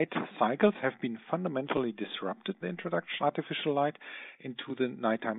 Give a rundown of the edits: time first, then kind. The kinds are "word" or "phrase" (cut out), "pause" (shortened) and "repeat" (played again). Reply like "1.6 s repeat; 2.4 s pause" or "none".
2.6 s word; 3.2 s word